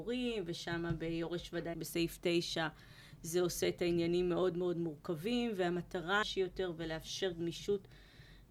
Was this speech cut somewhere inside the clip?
yes; 2 cuts; at 1.7 s, 6.2 s

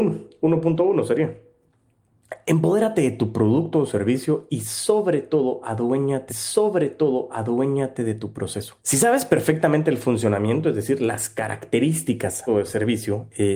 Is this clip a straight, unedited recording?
no; 3 cuts; at 6.3 s, 8.8 s, 12.5 s

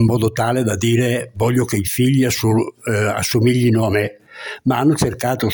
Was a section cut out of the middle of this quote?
no; 0 cuts

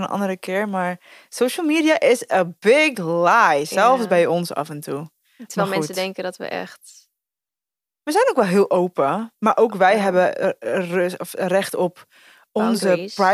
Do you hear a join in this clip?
no; 0 cuts

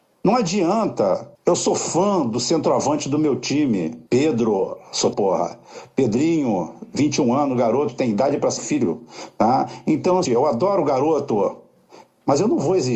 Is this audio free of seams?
no; 5 cuts; at 1.3 s, 4.1 s, 5.1 s, 8.6 s, 10.3 s

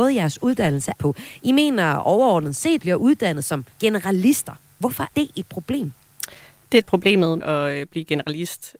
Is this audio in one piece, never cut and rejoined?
no; 6 cuts; at 0.9 s, 2.8 s, 3.7 s, 5.1 s, 6.8 s, 7.4 s

